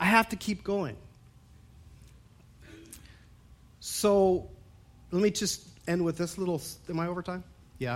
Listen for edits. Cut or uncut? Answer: uncut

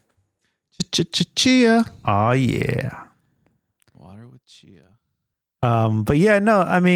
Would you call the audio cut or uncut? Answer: uncut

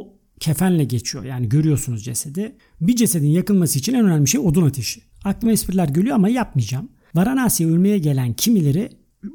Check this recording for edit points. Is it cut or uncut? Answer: uncut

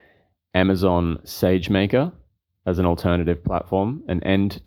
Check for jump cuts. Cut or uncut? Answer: uncut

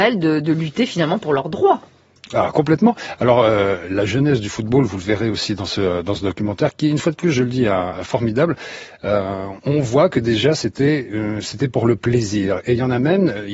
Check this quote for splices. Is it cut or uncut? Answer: uncut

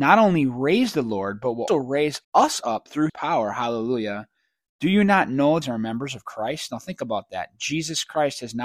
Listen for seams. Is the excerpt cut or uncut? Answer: cut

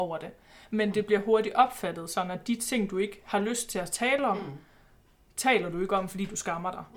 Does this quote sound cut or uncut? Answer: uncut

